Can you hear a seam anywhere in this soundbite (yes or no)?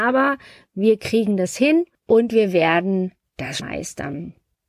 yes